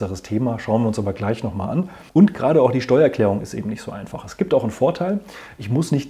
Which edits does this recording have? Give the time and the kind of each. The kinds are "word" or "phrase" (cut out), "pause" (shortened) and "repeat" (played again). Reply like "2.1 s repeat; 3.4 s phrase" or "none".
2.1 s pause